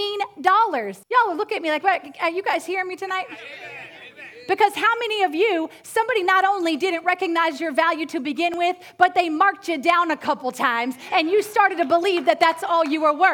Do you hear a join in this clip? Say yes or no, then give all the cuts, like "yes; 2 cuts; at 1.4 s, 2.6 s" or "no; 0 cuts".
yes; 1 cut; at 1.0 s